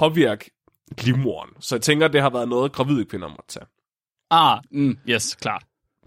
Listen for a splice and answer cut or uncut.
uncut